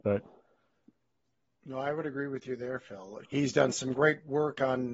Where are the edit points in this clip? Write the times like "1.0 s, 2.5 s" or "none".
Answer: 3.2 s